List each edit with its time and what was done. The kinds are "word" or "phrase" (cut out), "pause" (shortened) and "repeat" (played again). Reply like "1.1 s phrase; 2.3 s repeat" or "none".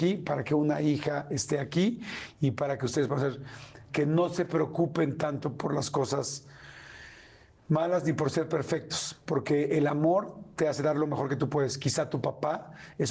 3.9 s word